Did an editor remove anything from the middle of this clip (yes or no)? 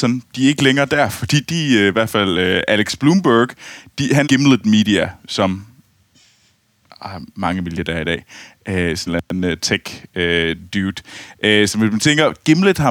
yes